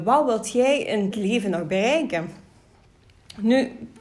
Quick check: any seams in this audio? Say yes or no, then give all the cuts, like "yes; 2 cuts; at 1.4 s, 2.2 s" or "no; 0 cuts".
yes; 1 cut; at 1.1 s